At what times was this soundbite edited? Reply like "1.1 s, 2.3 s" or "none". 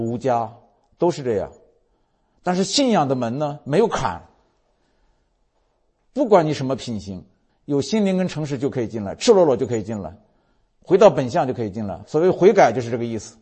none